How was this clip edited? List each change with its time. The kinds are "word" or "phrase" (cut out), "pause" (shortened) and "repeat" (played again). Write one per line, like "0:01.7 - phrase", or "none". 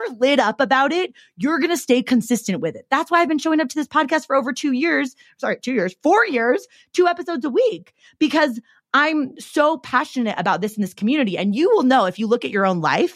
none

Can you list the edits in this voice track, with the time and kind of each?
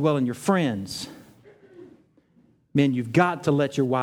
none

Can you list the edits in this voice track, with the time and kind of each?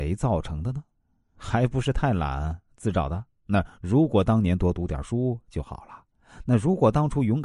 0:03.3 - pause

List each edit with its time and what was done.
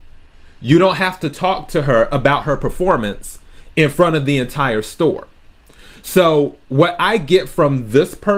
none

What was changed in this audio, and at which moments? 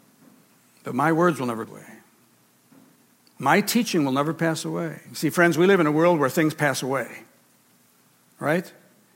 0:01.7 - word
0:05.1 - pause

